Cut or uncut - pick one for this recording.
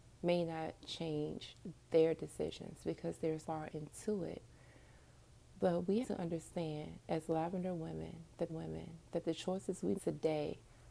cut